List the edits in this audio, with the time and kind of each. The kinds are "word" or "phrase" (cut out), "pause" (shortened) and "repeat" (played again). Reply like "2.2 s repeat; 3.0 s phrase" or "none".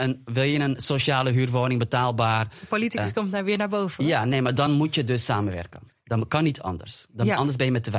none